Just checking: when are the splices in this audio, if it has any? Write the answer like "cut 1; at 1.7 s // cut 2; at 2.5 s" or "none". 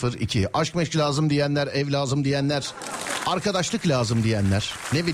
none